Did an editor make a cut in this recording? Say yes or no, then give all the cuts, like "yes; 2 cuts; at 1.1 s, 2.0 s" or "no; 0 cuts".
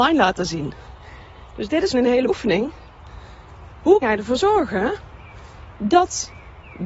yes; 3 cuts; at 1.9 s, 2.3 s, 4.0 s